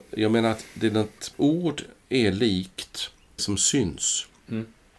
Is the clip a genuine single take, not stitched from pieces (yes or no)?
no